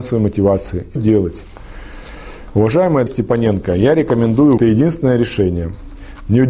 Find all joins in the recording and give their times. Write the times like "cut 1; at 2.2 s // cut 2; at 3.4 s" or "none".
cut 1; at 1.0 s // cut 2; at 3.1 s // cut 3; at 4.6 s